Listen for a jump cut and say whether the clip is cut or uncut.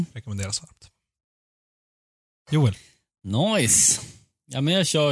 uncut